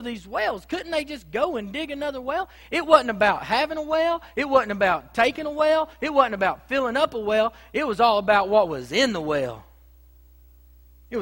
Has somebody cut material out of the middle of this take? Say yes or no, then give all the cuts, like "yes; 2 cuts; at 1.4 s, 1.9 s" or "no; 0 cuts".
no; 0 cuts